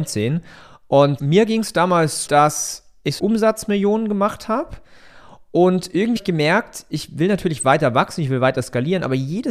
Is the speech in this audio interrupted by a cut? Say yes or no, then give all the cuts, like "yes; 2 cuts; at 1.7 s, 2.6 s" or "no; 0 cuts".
yes; 4 cuts; at 1.2 s, 2.3 s, 3.2 s, 6.2 s